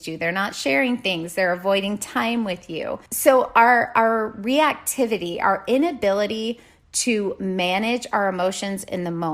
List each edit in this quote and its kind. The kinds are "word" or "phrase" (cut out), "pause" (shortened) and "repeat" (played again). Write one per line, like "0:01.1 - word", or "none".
0:03.1 - pause